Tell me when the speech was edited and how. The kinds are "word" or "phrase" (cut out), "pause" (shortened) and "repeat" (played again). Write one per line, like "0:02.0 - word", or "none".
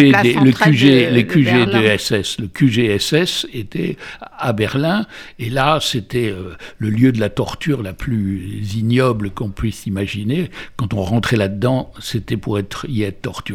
none